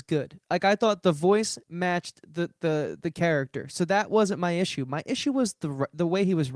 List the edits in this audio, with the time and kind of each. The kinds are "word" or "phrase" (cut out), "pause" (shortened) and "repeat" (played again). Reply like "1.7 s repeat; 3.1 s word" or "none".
none